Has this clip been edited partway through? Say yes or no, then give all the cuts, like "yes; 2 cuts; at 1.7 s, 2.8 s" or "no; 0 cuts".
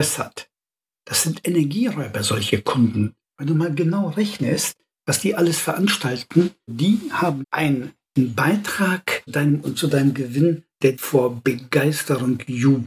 yes; 5 cuts; at 6.7 s, 7.4 s, 9.3 s, 9.6 s, 10.9 s